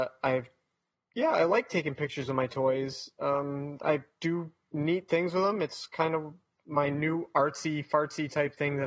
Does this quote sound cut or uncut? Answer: uncut